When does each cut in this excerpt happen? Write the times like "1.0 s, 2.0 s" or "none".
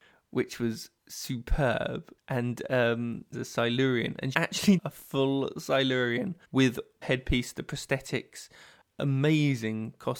1.0 s, 3.3 s, 4.3 s, 4.8 s, 6.4 s, 7.0 s